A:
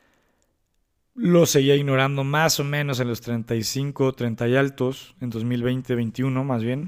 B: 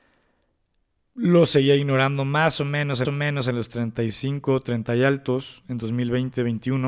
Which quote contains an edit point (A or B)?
B